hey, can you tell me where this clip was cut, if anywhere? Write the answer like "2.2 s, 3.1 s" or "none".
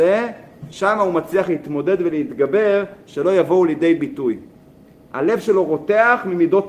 none

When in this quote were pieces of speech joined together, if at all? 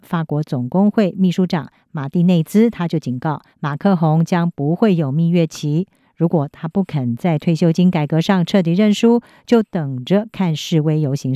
3.5 s

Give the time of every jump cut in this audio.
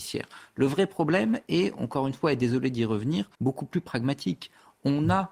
3.3 s

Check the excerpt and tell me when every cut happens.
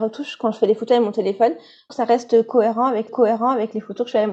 1.9 s, 3.1 s

